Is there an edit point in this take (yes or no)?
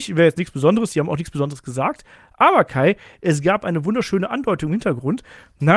no